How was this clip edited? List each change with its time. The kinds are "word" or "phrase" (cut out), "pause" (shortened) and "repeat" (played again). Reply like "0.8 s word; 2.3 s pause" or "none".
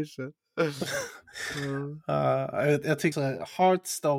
3.1 s word